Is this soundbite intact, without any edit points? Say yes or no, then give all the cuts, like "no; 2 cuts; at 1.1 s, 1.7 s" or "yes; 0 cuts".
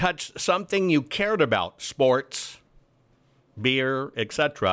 yes; 0 cuts